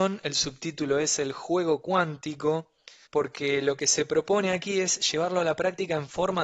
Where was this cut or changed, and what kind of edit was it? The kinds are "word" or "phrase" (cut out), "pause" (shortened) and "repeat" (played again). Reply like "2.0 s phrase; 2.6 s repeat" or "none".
3.1 s pause